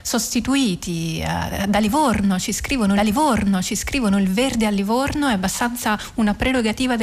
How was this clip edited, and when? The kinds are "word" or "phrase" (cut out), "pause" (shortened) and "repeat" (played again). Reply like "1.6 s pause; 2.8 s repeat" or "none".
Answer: 3.0 s repeat